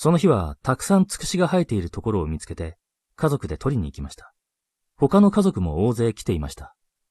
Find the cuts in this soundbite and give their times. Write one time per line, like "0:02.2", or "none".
none